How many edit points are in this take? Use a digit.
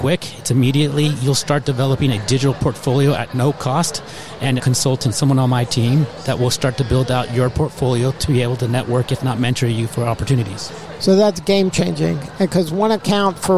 1